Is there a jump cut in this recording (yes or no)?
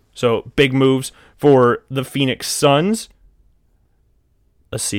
no